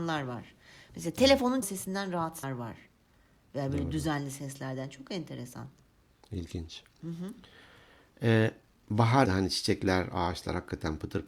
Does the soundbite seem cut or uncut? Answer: cut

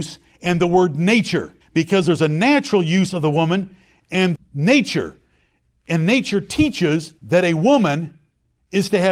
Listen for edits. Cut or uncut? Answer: cut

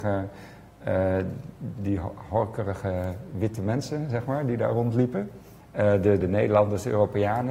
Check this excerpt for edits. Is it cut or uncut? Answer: cut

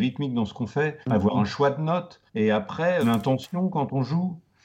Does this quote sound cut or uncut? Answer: cut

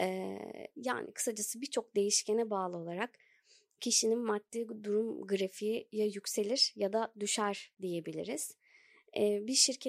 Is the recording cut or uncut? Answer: uncut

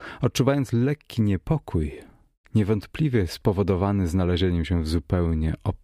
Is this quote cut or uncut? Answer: uncut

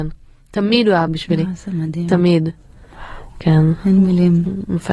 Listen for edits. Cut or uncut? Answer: cut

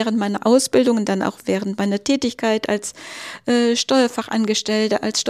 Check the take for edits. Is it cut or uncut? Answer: uncut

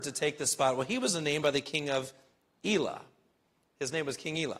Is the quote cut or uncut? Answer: uncut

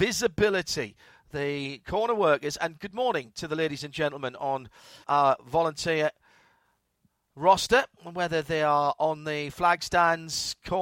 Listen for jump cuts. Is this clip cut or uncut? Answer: cut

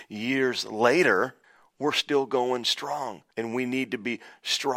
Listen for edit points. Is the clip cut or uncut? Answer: cut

